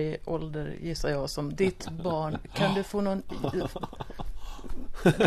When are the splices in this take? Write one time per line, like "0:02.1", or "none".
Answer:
0:01.6